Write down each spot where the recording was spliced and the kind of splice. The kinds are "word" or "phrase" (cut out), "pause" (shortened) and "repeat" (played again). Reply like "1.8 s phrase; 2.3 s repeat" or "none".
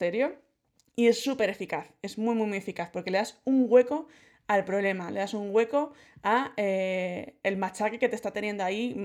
none